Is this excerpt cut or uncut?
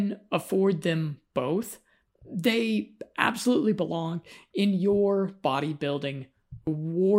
uncut